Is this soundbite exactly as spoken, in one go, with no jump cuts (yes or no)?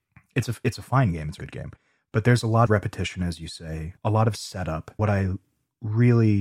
no